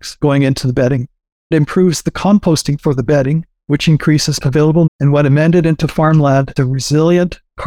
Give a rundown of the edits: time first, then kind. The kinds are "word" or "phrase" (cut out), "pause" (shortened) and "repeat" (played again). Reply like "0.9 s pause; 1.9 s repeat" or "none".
1.5 s word; 2.8 s word; 4.4 s word; 4.9 s word; 6.6 s word